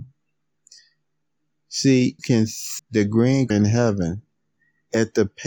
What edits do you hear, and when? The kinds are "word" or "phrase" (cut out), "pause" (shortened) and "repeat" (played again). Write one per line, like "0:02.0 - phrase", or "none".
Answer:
0:02.2 - word
0:02.8 - word
0:03.5 - word